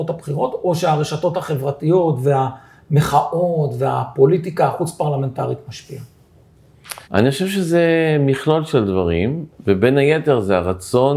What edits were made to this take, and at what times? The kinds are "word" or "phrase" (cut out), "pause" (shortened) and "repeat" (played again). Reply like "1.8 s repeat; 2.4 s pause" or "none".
7.0 s pause

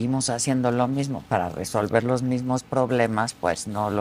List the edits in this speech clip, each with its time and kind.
none

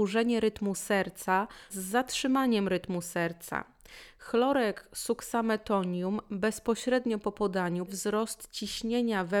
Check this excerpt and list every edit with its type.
1.7 s phrase; 7.9 s word

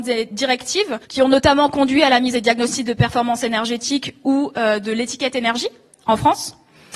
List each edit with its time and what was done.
1.0 s pause; 2.3 s phrase

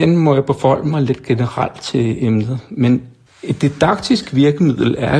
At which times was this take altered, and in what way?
3.3 s pause

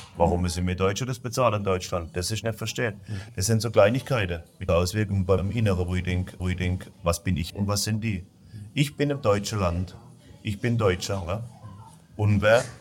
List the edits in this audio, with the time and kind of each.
2.4 s phrase; 4.7 s word; 5.4 s word; 6.4 s repeat; 7.5 s word

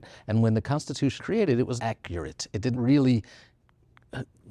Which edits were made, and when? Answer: 1.2 s word; 1.8 s word; 2.7 s word

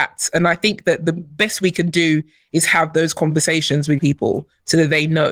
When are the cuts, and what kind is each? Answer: 4.0 s word

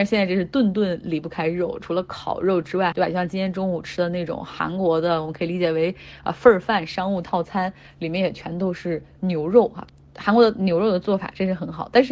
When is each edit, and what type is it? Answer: 2.9 s phrase

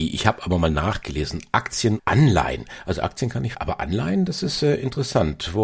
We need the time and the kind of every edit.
2.0 s word; 3.5 s word

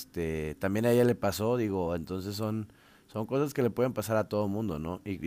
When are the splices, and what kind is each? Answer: none

